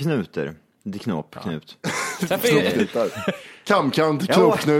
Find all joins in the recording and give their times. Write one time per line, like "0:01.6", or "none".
none